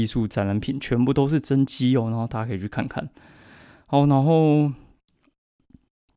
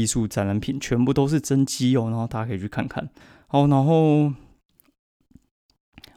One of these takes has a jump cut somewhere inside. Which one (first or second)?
second